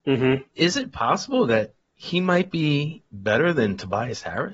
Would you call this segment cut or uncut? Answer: cut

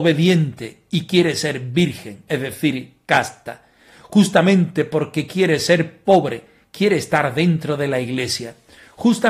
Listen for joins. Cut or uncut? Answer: uncut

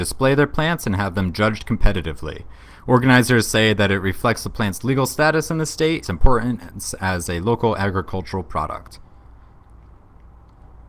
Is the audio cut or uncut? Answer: cut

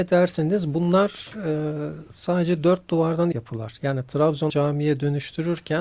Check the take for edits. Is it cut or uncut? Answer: cut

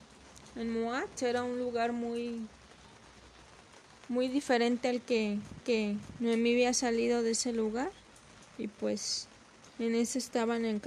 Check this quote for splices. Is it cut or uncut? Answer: cut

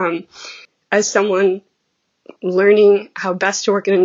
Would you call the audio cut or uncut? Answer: uncut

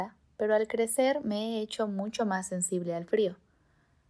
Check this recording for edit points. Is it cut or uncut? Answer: uncut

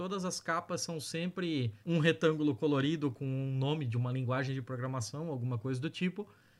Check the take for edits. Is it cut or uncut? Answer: cut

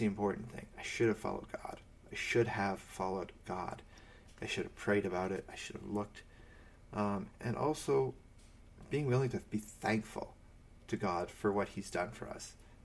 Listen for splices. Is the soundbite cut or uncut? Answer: uncut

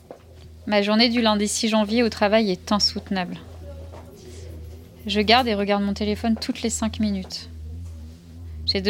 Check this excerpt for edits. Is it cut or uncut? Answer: uncut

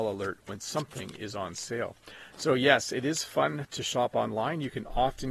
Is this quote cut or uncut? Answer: uncut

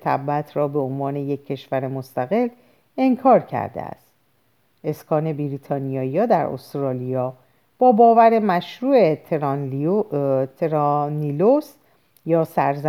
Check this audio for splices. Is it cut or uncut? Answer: uncut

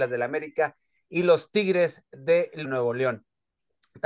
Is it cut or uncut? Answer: cut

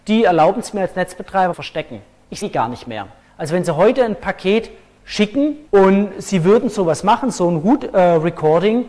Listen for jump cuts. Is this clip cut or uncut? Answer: cut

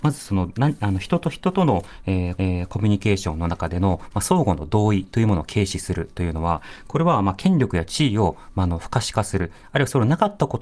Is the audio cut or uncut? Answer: cut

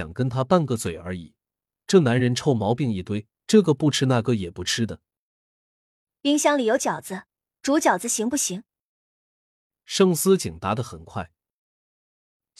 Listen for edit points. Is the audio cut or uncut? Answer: cut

